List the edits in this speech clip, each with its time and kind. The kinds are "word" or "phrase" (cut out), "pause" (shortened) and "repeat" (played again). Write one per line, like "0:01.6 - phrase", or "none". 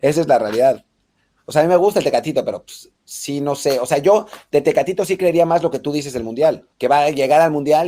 0:03.0 - pause
0:06.7 - pause